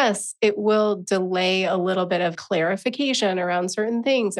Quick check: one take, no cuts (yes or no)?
no